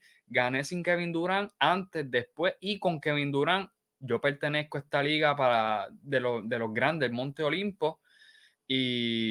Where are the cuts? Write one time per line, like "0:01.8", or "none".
none